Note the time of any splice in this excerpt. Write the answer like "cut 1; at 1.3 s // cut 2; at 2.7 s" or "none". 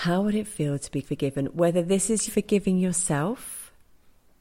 cut 1; at 1.0 s // cut 2; at 2.3 s

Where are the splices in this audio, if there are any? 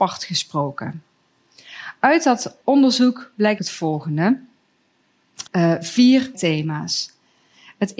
cut 1; at 2.6 s // cut 2; at 3.6 s // cut 3; at 5.5 s // cut 4; at 6.3 s

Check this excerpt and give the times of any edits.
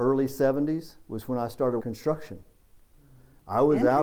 cut 1; at 1.8 s

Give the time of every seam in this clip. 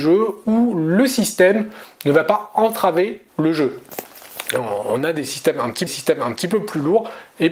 cut 1; at 3.3 s // cut 2; at 5.9 s

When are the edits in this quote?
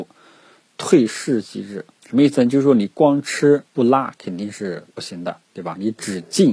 cut 1; at 1.9 s // cut 2; at 3.7 s // cut 3; at 4.9 s // cut 4; at 5.4 s

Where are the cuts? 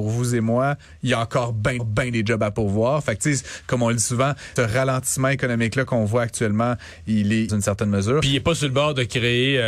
cut 1; at 1.8 s // cut 2; at 4.6 s // cut 3; at 7.5 s

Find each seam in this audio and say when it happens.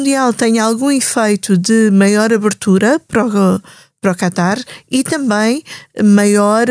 none

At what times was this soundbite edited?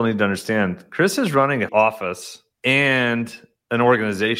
cut 1; at 1.7 s // cut 2; at 2.5 s

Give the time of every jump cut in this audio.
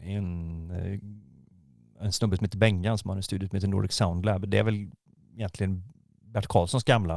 none

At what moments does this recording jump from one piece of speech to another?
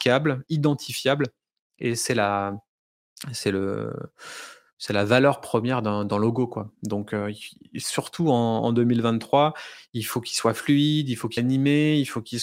cut 1; at 11.4 s

